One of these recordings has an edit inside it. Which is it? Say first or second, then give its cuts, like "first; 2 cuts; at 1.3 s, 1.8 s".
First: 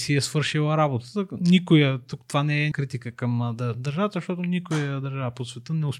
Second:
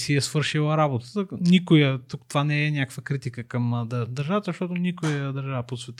first; 1 cut; at 2.7 s